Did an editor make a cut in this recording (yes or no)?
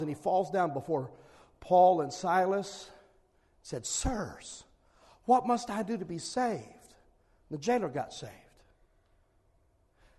no